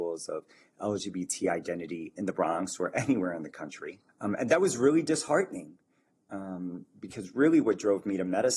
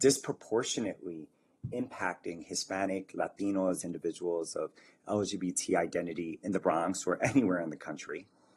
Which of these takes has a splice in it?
first; 1 cut; at 4.1 s

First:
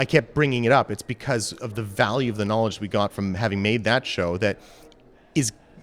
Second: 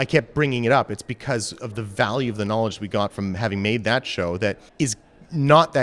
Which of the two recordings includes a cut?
second; 1 cut; at 4.7 s

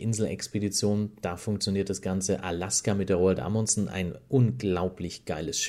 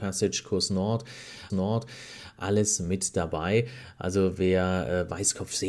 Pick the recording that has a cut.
second; 1 cut; at 1.5 s

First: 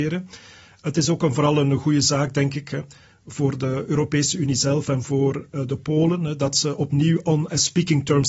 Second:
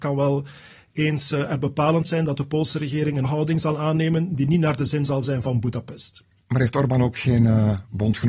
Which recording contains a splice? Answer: second; 1 cut; at 3.2 s

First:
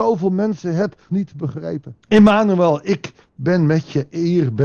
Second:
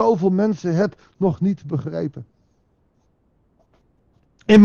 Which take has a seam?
first; 2 cuts; at 1.1 s, 2.0 s

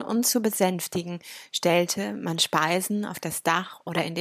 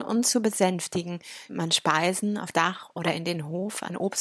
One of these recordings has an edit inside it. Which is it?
second; 2 cuts; at 1.5 s, 2.5 s

